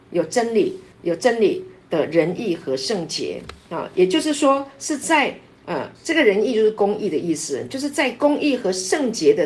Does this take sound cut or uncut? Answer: cut